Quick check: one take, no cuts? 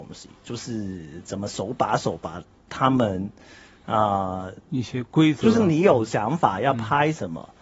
yes; 0 cuts

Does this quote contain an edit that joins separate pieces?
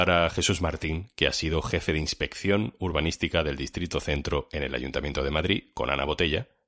no; 0 cuts

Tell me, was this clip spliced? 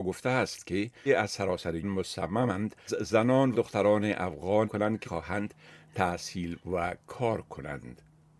yes; 6 cuts; at 1.1 s, 1.8 s, 2.9 s, 3.5 s, 4.6 s, 5.0 s

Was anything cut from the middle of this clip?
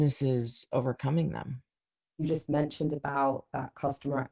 no; 0 cuts

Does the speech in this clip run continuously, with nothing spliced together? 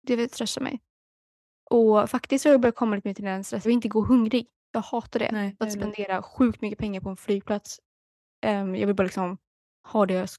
no; 2 cuts; at 3.6 s, 5.6 s

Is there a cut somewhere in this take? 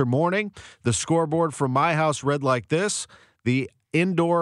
no; 0 cuts

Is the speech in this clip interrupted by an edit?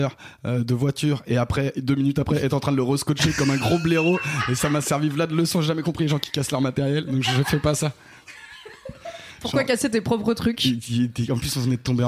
no; 0 cuts

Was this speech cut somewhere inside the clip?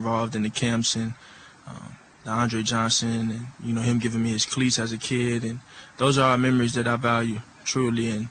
no; 0 cuts

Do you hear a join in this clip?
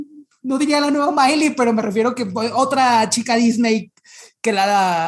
no; 0 cuts

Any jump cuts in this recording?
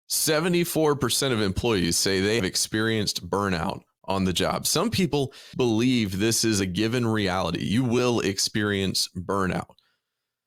yes; 2 cuts; at 2.4 s, 5.5 s

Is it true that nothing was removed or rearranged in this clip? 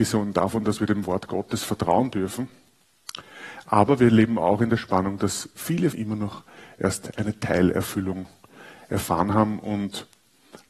no; 1 cut; at 5.9 s

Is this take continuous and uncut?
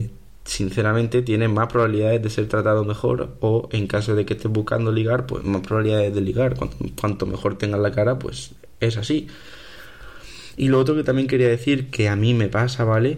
yes; 0 cuts

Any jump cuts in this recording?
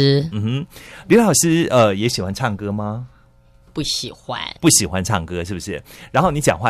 no; 0 cuts

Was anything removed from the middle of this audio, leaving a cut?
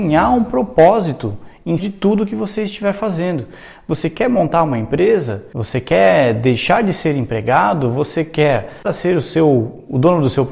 yes; 2 cuts; at 1.8 s, 8.8 s

